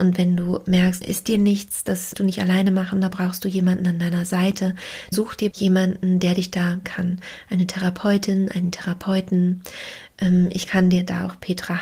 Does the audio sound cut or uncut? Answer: cut